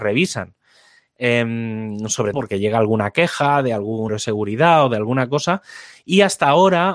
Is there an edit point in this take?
yes; 2 cuts; at 2.3 s, 4.1 s

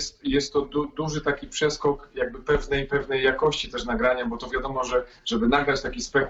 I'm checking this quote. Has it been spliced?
no; 0 cuts

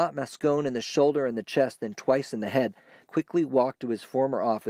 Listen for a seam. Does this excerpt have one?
yes; 1 cut; at 3.1 s

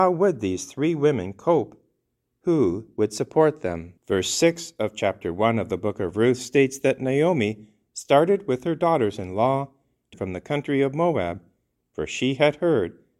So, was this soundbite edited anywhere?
yes; 2 cuts; at 4.0 s, 10.1 s

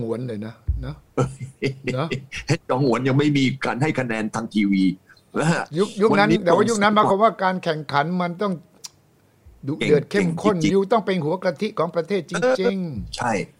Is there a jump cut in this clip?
no; 0 cuts

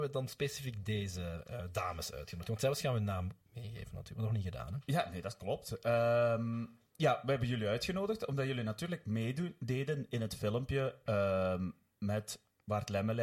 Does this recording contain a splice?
yes; 2 cuts; at 3.4 s, 6.9 s

